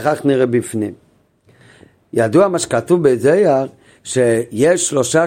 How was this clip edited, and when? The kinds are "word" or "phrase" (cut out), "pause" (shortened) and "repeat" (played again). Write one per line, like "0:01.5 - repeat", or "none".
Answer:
none